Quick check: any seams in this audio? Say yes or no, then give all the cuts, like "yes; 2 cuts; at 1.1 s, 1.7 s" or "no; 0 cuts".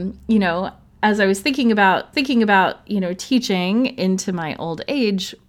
yes; 1 cut; at 2.1 s